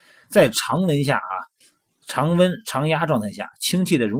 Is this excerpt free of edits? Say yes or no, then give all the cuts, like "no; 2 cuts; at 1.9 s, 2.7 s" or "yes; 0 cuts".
yes; 0 cuts